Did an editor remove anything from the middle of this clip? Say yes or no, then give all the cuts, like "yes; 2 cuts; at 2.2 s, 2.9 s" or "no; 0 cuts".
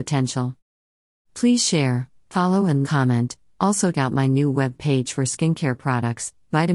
yes; 2 cuts; at 2.8 s, 3.9 s